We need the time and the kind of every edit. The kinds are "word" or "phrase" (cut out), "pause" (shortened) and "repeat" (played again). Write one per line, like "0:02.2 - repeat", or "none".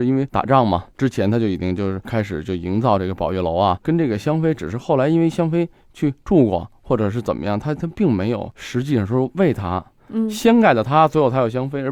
0:03.8 - word